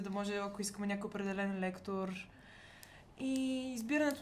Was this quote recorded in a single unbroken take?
yes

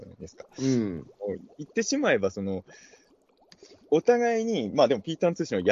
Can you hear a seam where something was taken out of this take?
no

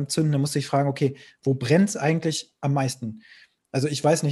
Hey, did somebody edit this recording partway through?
no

